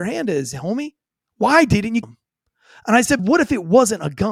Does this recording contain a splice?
yes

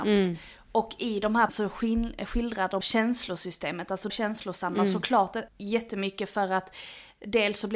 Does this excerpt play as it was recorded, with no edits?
no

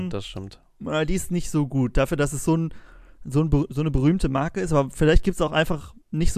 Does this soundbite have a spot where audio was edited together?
no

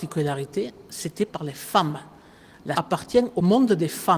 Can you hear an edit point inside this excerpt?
yes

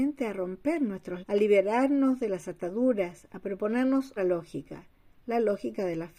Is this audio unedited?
no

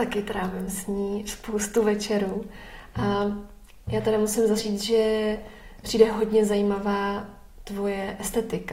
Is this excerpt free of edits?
no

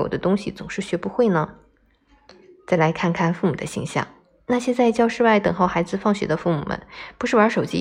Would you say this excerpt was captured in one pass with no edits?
yes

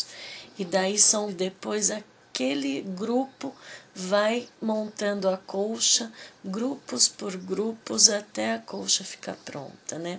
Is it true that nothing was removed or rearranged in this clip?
no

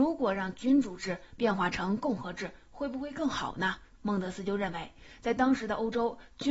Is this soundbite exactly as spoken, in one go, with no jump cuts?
yes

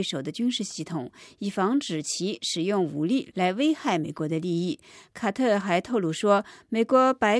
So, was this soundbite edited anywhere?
no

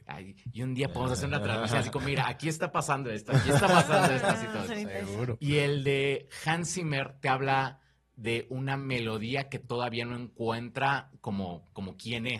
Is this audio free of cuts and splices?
yes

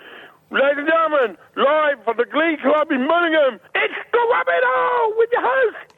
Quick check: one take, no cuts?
no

